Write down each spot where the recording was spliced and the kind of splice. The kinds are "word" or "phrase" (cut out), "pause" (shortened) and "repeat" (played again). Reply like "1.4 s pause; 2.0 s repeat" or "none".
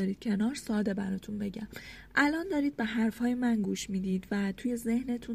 none